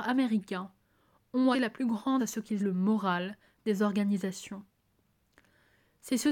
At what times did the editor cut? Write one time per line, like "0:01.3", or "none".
0:01.5
0:02.2
0:02.6